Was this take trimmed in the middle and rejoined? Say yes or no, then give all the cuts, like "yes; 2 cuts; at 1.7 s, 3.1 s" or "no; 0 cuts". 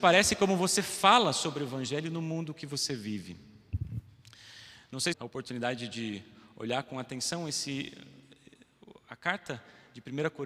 yes; 1 cut; at 5.1 s